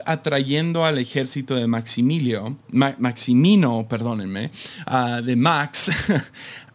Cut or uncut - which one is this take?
cut